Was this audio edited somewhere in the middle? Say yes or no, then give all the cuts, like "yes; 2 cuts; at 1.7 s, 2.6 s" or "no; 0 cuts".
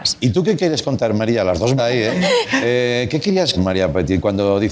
yes; 2 cuts; at 1.8 s, 3.6 s